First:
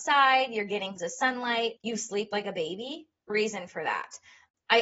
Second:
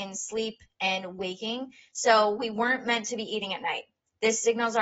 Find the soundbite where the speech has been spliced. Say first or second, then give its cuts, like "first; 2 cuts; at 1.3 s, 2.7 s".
first; 3 cuts; at 1.0 s, 1.8 s, 3.3 s